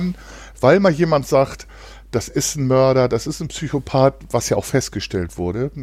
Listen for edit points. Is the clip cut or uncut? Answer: uncut